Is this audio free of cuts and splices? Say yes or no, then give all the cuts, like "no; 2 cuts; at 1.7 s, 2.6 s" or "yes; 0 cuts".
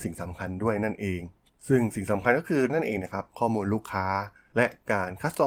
no; 1 cut; at 2.7 s